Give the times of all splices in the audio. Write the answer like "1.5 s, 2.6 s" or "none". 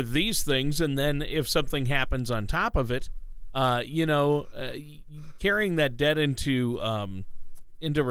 none